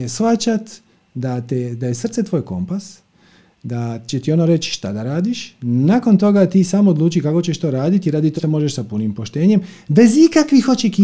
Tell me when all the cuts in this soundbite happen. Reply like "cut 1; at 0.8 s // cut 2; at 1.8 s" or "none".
cut 1; at 8.4 s